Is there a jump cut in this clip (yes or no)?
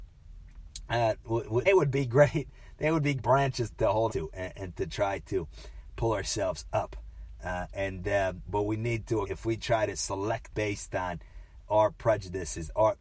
yes